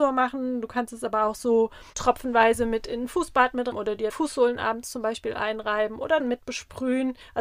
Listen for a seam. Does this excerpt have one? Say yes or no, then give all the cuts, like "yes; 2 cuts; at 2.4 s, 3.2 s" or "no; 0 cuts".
yes; 4 cuts; at 1.9 s, 3.7 s, 4.1 s, 6.2 s